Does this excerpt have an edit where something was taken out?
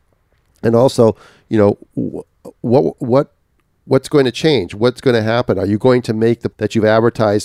yes; 1 cut; at 6.5 s

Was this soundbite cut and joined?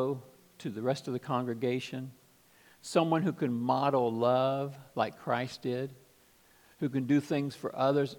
no; 0 cuts

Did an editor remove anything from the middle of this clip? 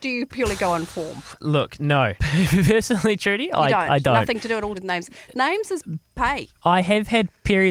yes; 3 cuts; at 1.4 s, 2.2 s, 4.7 s

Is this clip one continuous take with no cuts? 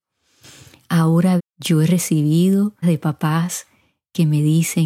no; 2 cuts; at 1.4 s, 2.8 s

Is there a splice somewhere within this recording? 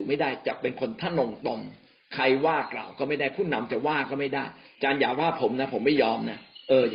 no; 0 cuts

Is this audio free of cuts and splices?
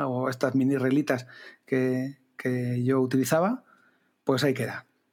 yes; 0 cuts

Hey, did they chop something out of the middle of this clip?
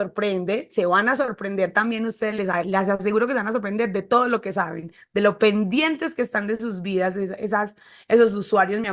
no; 0 cuts

